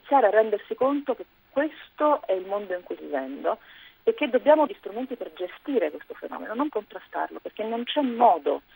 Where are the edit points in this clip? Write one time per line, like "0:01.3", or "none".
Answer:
0:03.0
0:04.7
0:06.7